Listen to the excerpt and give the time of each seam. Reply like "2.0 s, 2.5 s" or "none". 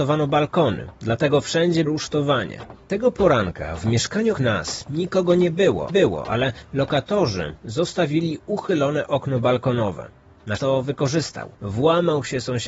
1.9 s, 4.3 s, 5.9 s, 10.6 s, 11.5 s